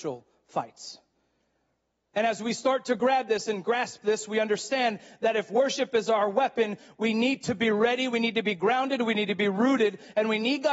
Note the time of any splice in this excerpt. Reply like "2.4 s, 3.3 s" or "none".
none